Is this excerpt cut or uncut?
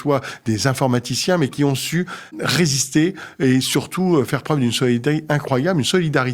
uncut